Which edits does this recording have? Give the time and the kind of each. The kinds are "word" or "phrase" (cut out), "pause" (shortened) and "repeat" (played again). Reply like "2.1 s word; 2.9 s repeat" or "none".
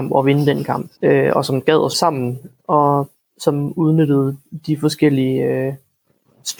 1.0 s pause; 1.9 s word